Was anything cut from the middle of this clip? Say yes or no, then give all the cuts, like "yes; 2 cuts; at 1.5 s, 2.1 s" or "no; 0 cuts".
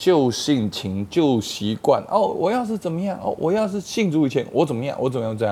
no; 0 cuts